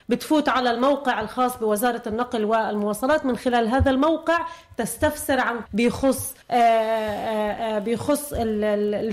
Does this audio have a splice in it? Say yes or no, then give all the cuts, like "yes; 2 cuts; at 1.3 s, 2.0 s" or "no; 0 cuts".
yes; 2 cuts; at 5.7 s, 6.4 s